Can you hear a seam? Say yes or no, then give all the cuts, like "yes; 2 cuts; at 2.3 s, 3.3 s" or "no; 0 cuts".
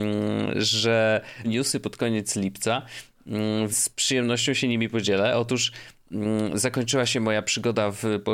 yes; 2 cuts; at 1.4 s, 3.7 s